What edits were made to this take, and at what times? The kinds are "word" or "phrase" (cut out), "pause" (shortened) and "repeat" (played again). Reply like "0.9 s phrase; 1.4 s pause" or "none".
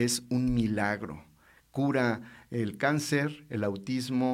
none

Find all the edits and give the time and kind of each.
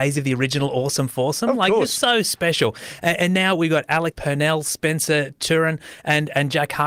4.1 s phrase

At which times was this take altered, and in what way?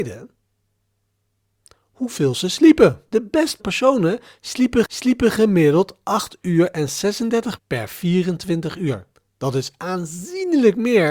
3.1 s pause; 3.6 s word; 4.8 s repeat; 7.6 s word; 9.1 s pause

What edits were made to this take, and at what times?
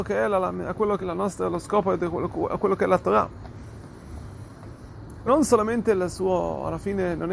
1.0 s word; 5.3 s word

